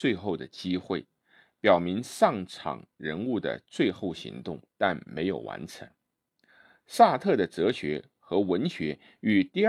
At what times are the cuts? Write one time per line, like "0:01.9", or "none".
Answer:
0:04.7

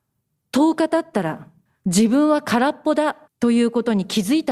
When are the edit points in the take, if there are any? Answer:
0:01.7
0:03.3

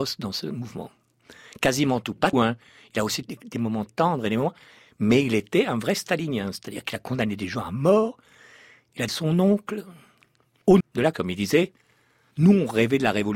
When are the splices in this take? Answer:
0:02.3
0:03.2
0:03.9
0:09.1
0:10.8
0:11.1

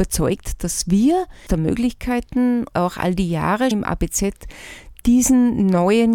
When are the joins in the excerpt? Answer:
0:01.5
0:02.7
0:03.7

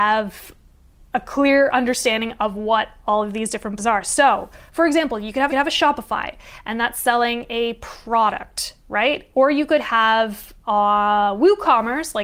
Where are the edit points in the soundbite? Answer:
0:03.8
0:05.5

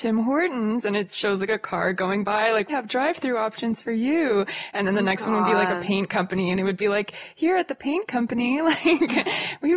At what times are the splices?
0:02.7

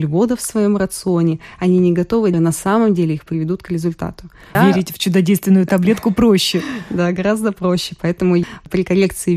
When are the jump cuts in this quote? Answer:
0:02.3

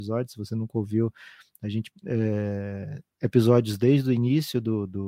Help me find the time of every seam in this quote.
0:01.9

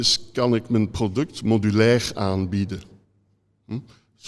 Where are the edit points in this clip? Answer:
none

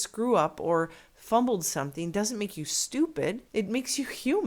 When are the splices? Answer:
0:03.5

